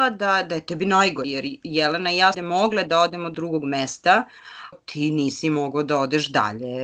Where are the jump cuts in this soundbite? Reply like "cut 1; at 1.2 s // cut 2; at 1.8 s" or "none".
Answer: cut 1; at 1.2 s // cut 2; at 2.3 s // cut 3; at 3.3 s // cut 4; at 4.7 s